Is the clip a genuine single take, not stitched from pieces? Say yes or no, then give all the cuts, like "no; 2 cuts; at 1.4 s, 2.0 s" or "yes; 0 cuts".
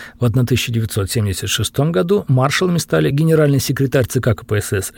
yes; 0 cuts